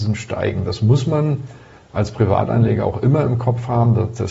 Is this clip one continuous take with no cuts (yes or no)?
yes